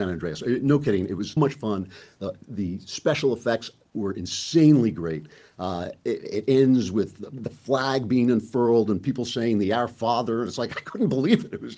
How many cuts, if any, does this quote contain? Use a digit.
1